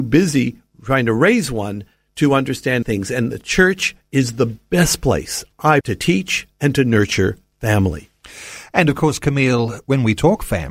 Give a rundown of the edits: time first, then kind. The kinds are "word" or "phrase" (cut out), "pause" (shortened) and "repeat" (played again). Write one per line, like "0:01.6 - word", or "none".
0:02.8 - word
0:05.8 - word